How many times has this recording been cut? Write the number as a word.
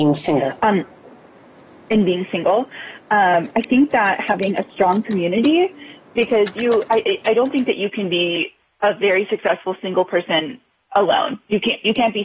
zero